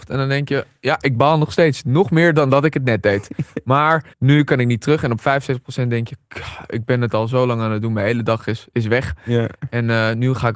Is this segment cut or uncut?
cut